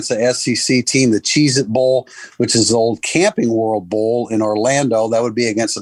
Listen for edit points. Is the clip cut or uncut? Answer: uncut